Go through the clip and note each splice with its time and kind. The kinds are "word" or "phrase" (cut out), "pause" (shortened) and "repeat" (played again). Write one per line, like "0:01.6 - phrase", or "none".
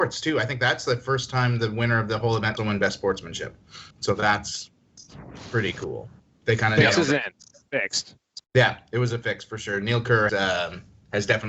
0:02.6 - word
0:03.9 - pause
0:08.4 - pause
0:10.3 - word